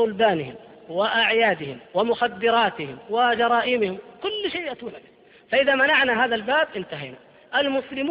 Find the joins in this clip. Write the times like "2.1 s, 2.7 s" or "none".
1.9 s